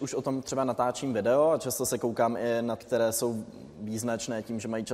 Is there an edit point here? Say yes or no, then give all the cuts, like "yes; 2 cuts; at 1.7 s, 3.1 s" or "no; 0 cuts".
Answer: yes; 1 cut; at 2.8 s